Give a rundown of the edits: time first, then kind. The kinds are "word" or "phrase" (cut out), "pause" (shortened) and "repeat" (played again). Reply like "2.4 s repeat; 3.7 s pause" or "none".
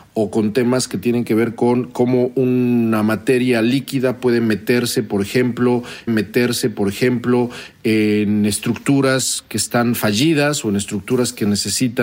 6.1 s repeat